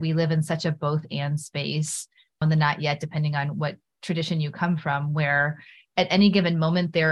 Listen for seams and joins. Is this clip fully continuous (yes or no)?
no